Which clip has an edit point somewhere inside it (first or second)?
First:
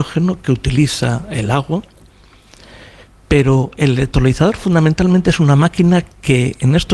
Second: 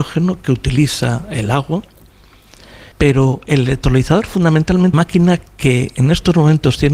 second